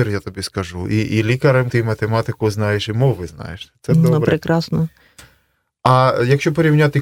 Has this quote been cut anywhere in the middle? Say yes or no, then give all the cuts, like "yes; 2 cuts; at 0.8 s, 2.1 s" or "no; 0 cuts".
yes; 1 cut; at 1.7 s